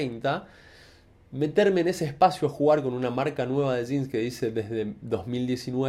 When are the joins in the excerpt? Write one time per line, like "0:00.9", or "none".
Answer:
none